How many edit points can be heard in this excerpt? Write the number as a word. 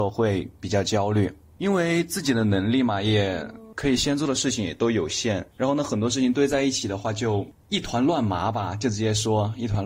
one